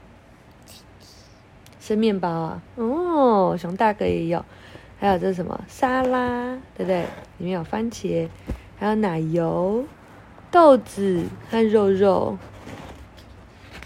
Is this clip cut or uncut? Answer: cut